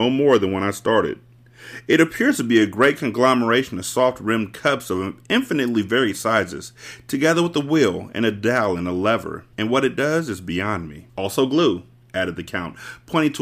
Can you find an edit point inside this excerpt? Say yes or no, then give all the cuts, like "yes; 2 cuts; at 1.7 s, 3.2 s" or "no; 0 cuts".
yes; 2 cuts; at 9.5 s, 11.1 s